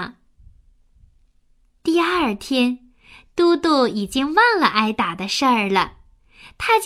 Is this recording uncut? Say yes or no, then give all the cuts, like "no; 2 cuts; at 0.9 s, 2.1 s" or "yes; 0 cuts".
yes; 0 cuts